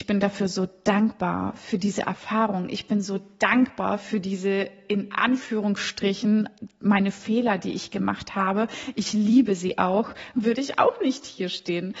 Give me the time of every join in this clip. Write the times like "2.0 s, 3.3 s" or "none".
10.3 s